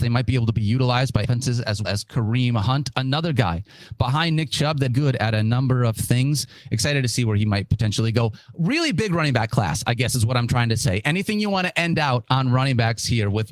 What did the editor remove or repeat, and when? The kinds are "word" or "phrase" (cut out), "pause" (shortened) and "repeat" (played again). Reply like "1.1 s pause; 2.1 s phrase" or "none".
1.2 s word; 1.8 s word; 4.9 s phrase